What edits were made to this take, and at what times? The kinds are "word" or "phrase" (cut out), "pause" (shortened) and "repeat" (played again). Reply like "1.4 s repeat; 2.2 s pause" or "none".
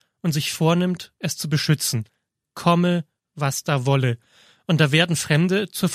none